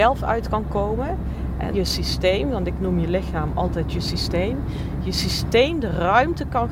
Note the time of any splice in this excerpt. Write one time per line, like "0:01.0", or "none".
0:01.7